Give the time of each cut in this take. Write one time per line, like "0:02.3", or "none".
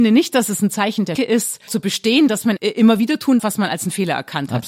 0:01.2
0:01.7
0:02.6
0:03.4